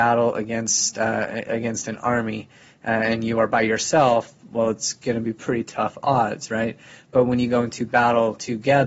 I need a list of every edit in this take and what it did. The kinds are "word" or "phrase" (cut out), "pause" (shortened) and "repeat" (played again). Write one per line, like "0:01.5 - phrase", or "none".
none